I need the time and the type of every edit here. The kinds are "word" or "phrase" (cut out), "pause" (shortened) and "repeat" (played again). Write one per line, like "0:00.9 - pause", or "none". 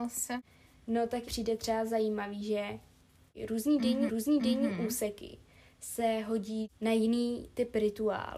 0:01.3 - word
0:04.1 - repeat